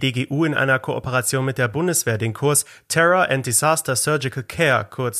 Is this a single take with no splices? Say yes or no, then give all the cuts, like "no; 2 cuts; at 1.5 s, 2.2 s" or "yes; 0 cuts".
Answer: yes; 0 cuts